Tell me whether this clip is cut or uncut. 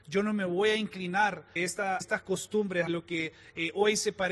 cut